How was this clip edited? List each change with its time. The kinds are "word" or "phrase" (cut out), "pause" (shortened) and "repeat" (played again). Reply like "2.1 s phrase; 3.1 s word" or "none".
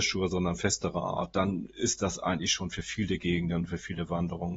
none